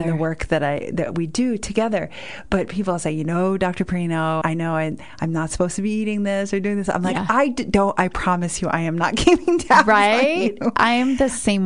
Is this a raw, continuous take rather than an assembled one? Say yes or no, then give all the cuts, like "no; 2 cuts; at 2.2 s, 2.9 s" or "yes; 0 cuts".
no; 1 cut; at 4.4 s